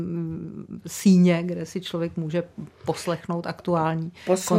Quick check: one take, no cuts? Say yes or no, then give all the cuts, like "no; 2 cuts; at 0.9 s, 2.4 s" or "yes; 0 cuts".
yes; 0 cuts